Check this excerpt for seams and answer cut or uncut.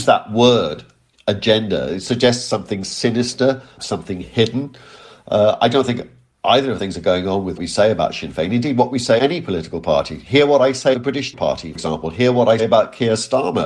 cut